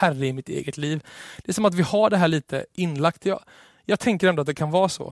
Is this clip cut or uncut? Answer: uncut